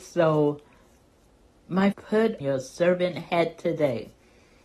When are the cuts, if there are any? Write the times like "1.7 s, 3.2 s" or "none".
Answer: 1.9 s, 2.4 s